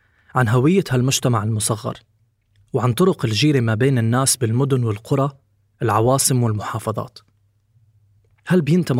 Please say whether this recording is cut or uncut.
uncut